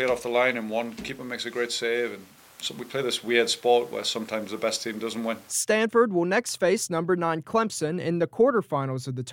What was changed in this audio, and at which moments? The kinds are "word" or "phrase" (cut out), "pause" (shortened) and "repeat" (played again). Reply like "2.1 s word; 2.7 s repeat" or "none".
none